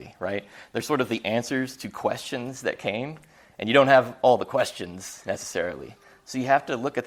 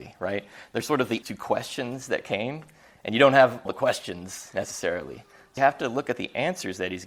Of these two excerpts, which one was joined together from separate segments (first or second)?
second